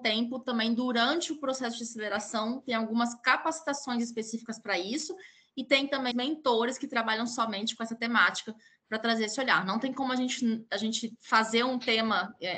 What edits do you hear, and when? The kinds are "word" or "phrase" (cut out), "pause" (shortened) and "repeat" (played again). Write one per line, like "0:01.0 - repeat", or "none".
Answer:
0:06.1 - word